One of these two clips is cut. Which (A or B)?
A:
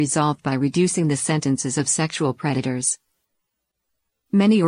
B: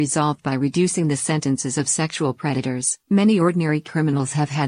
B